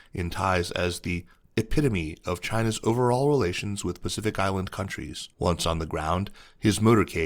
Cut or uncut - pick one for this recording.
cut